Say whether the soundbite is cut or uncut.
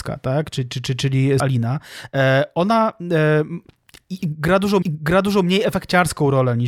cut